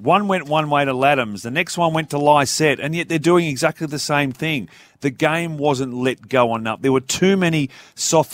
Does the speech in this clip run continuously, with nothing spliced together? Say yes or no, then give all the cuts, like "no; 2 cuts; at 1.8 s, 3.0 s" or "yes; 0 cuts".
yes; 0 cuts